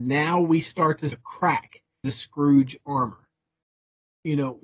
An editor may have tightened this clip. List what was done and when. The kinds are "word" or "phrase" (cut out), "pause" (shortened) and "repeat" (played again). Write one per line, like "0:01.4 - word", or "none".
0:01.1 - word
0:02.0 - word